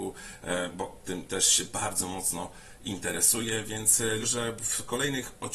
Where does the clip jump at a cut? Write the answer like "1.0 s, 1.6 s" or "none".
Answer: 4.2 s